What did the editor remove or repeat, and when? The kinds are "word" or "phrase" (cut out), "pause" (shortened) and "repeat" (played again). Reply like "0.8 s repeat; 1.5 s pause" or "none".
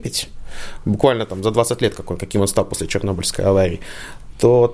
none

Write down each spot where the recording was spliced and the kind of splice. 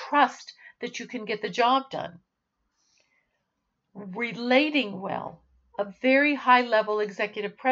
none

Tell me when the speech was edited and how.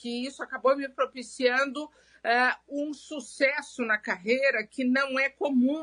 none

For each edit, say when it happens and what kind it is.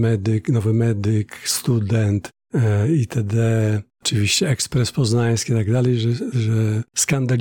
none

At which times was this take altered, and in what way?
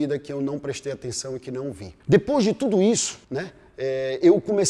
2.0 s pause; 3.2 s pause

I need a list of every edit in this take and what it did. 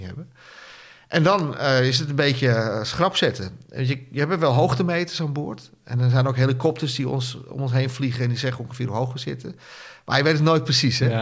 none

